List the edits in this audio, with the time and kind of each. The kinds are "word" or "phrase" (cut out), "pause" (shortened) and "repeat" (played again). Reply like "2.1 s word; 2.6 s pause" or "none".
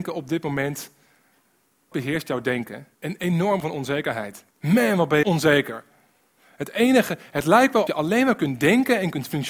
1.9 s word; 2.9 s pause; 3.6 s word; 4.5 s pause; 5.2 s word; 7.9 s word